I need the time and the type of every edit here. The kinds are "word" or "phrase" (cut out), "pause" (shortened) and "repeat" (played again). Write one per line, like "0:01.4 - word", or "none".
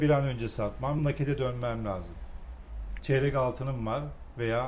0:01.0 - word
0:03.0 - phrase